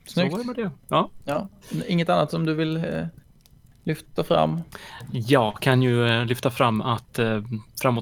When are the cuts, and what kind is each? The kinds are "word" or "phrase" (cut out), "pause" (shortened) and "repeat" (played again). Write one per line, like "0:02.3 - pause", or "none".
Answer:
none